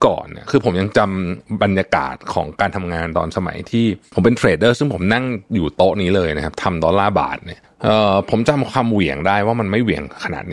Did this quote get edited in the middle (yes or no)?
yes